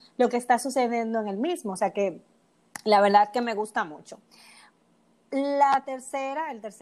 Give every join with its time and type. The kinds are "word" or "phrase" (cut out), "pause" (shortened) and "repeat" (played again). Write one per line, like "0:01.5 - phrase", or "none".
none